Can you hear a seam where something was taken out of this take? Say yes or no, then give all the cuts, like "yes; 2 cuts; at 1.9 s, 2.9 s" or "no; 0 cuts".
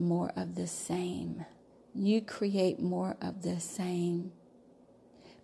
yes; 1 cut; at 1.7 s